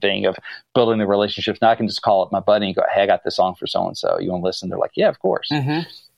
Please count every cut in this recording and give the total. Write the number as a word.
zero